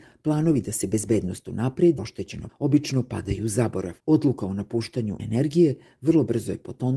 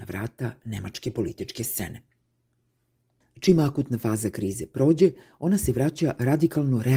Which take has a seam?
first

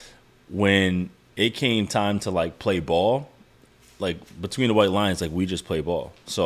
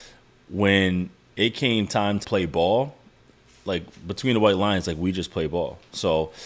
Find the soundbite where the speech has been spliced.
second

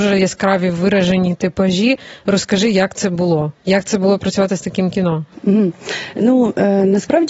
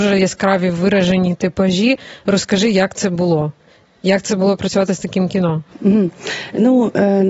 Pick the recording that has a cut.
first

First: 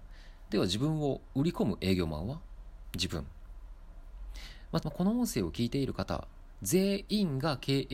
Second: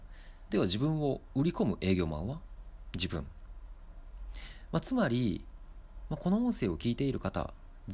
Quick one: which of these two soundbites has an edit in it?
first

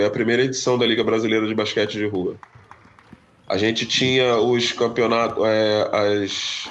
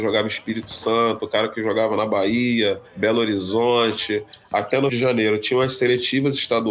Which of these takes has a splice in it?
second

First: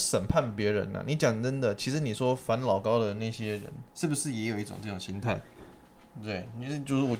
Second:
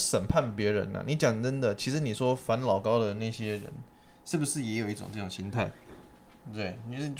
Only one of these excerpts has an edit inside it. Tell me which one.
first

